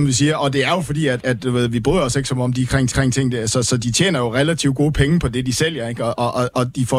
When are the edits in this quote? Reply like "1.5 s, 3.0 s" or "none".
2.9 s